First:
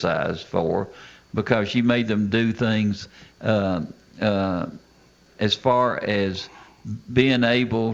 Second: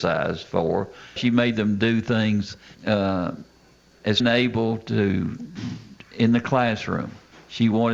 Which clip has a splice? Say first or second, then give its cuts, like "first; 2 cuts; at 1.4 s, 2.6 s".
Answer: second; 3 cuts; at 1.2 s, 2.7 s, 4.2 s